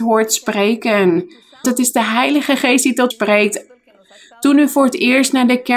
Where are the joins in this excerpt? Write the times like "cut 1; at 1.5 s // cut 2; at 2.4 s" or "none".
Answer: cut 1; at 1.6 s // cut 2; at 3.1 s